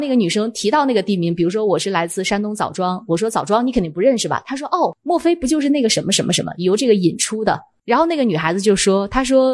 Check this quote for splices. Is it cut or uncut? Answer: uncut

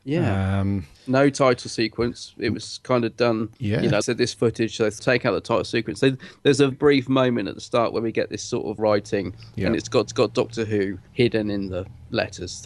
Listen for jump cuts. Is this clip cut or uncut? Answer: cut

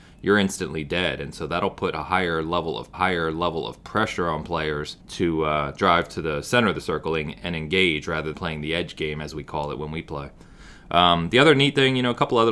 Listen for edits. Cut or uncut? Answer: cut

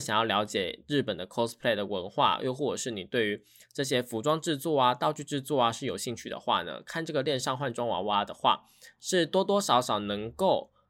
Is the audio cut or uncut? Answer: uncut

